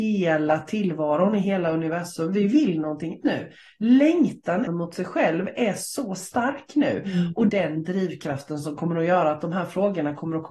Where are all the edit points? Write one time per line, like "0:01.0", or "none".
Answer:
0:03.2
0:04.7
0:07.5